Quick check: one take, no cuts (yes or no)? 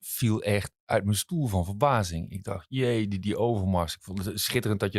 yes